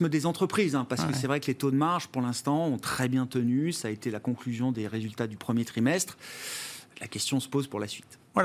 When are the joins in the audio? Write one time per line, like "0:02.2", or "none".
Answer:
none